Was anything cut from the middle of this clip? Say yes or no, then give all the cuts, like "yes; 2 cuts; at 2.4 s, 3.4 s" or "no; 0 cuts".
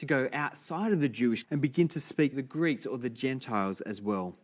yes; 2 cuts; at 1.4 s, 2.3 s